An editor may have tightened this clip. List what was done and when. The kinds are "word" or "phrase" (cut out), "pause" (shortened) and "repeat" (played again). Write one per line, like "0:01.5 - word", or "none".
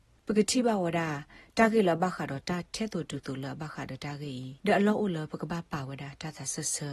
0:04.6 - pause